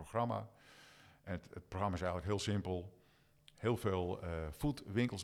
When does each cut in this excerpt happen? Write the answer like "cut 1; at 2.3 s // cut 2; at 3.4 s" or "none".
none